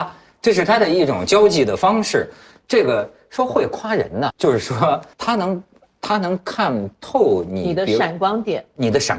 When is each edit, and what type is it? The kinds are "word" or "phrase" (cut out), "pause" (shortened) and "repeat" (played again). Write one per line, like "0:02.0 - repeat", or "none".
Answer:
0:04.3 - word
0:05.1 - pause